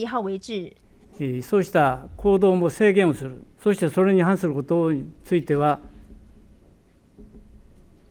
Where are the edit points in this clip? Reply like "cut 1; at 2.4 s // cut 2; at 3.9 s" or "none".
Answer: cut 1; at 3.5 s